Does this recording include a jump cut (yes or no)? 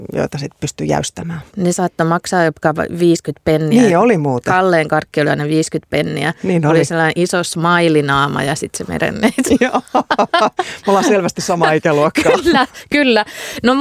yes